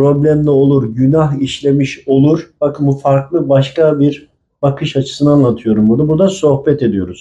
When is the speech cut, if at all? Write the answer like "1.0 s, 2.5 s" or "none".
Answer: none